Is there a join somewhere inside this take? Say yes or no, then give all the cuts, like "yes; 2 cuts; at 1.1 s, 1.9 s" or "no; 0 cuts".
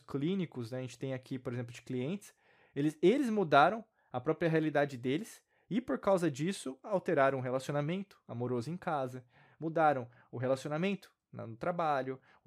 no; 0 cuts